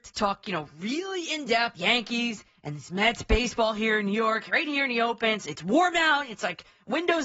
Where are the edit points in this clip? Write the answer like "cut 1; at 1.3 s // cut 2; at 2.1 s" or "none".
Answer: cut 1; at 1.7 s